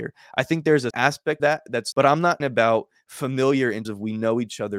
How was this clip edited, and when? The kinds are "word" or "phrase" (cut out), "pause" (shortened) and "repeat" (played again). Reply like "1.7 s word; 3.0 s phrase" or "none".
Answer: 0.9 s word; 1.4 s word; 1.9 s word; 2.4 s word; 3.8 s word